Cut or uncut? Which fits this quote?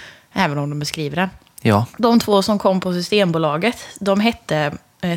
uncut